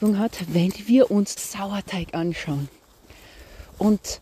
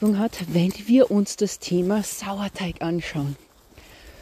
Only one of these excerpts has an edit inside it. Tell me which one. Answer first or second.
first